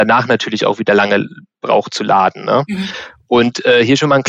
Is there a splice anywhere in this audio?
no; 0 cuts

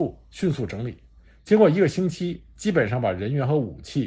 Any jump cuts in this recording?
no; 0 cuts

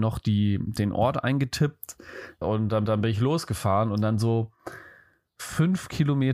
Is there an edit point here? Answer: yes; 2 cuts; at 2.4 s, 2.9 s

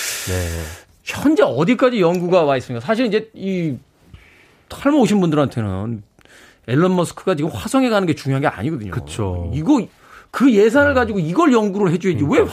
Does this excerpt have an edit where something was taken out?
no; 0 cuts

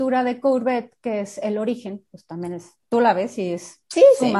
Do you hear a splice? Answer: yes; 1 cut; at 2.8 s

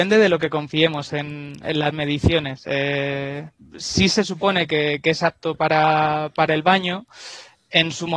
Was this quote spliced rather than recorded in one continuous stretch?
no; 0 cuts

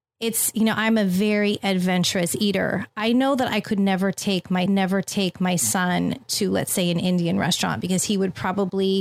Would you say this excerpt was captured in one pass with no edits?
no; 1 cut; at 4.7 s

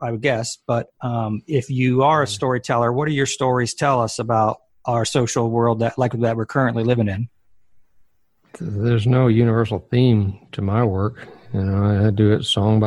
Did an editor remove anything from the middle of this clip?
no; 0 cuts

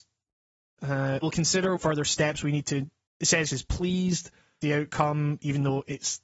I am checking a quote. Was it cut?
yes; 5 cuts; at 1.2 s, 1.8 s, 3.1 s, 3.5 s, 4.6 s

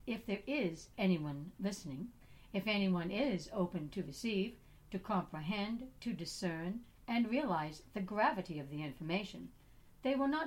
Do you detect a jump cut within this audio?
no; 0 cuts

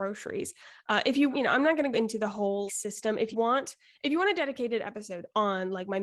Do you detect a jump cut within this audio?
yes; 4 cuts; at 1.3 s, 1.9 s, 2.7 s, 3.3 s

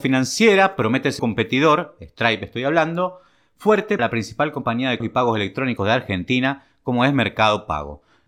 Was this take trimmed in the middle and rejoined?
yes; 3 cuts; at 1.2 s, 4.0 s, 5.0 s

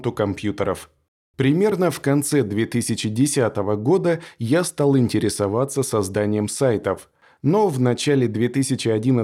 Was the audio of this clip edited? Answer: no; 0 cuts

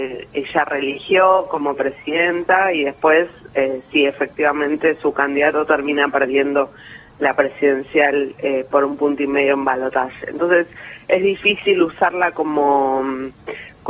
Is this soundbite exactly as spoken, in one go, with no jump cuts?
yes; 0 cuts

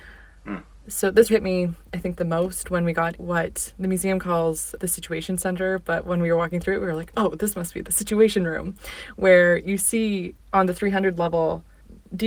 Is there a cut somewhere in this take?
yes; 3 cuts; at 1.3 s, 3.1 s, 10.4 s

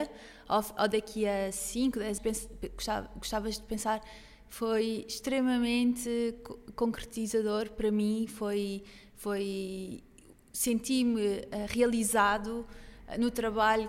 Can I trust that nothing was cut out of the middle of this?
no; 1 cut; at 2.2 s

